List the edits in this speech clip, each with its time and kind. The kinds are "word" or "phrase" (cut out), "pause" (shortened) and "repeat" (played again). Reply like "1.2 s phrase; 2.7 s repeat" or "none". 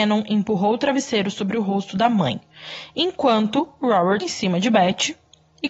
4.2 s word